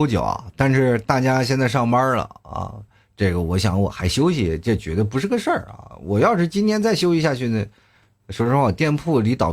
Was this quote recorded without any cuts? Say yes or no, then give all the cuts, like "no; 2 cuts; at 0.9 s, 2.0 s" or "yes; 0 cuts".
yes; 0 cuts